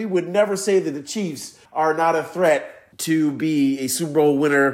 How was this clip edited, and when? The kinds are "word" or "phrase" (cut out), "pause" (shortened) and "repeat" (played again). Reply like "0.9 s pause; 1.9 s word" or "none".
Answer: 1.7 s pause; 2.9 s pause